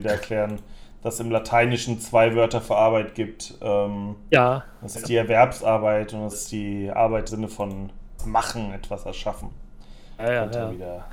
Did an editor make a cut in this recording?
yes; 4 cuts; at 4.9 s, 6.3 s, 7.3 s, 8.2 s

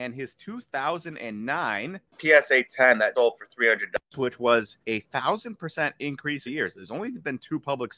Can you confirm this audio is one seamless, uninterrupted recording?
no; 4 cuts; at 2.1 s, 3.1 s, 4.8 s, 6.5 s

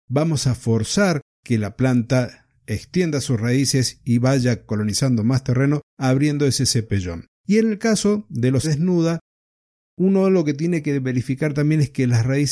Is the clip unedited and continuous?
no; 4 cuts; at 4.7 s, 5.9 s, 7.3 s, 8.6 s

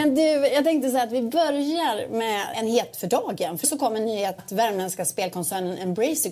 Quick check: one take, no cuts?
no; 4 cuts; at 2.5 s, 2.9 s, 3.6 s, 4.4 s

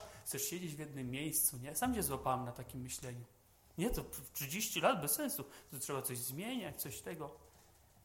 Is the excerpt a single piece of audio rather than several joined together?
yes; 0 cuts

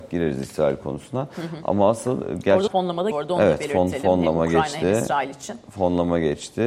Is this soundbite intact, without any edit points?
no; 2 cuts; at 2.7 s, 3.1 s

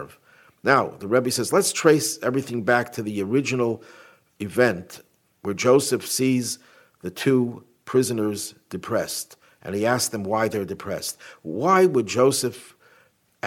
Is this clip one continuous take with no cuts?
yes; 0 cuts

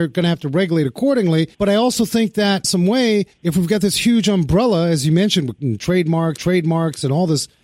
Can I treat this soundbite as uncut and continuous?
no; 5 cuts; at 1.5 s, 2.6 s, 3.3 s, 5.6 s, 6.4 s

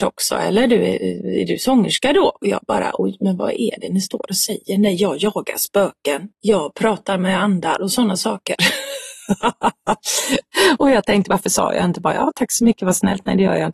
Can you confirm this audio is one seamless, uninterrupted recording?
no; 1 cut; at 6.3 s

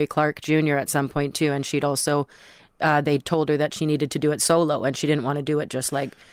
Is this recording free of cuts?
yes; 0 cuts

